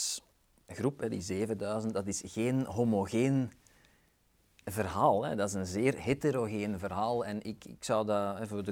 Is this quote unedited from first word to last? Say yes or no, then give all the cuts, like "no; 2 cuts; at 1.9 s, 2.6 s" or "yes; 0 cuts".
yes; 0 cuts